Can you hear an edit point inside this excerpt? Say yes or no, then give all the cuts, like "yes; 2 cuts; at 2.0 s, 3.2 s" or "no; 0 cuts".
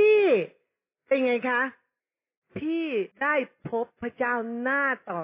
yes; 2 cuts; at 2.0 s, 3.1 s